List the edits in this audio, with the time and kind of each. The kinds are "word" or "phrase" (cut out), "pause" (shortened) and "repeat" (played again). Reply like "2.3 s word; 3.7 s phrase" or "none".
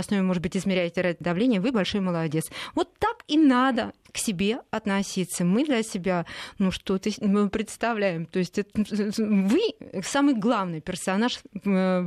1.2 s word